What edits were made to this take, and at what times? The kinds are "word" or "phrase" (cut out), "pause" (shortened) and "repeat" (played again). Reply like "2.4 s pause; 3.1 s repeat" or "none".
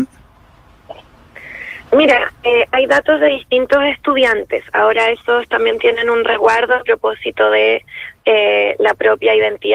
1.9 s pause